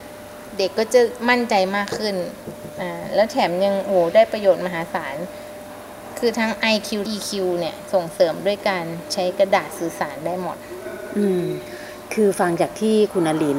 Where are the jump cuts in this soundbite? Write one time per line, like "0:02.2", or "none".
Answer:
0:07.1